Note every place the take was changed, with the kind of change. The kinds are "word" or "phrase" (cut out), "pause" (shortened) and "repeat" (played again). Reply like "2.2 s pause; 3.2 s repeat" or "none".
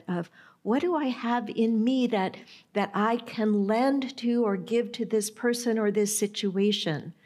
none